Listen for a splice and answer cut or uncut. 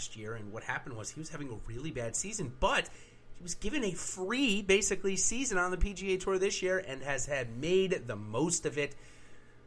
uncut